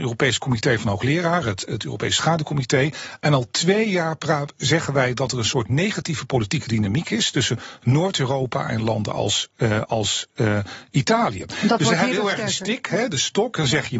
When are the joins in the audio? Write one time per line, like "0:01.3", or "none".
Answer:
none